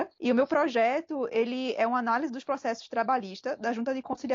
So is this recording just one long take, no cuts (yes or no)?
yes